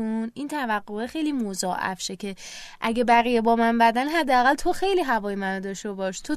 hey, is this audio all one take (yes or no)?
yes